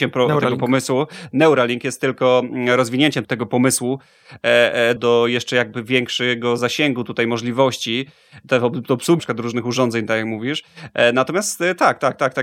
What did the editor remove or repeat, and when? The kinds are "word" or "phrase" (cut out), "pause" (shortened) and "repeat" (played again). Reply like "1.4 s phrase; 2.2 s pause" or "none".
3.2 s word; 5.0 s word; 9.2 s word